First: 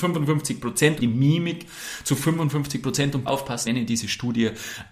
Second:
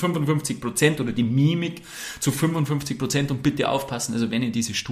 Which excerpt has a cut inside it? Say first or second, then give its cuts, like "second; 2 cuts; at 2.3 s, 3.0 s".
first; 3 cuts; at 1.0 s, 3.3 s, 3.6 s